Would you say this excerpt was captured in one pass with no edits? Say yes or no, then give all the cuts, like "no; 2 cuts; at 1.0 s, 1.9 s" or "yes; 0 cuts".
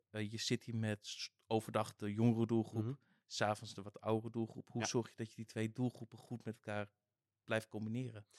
yes; 0 cuts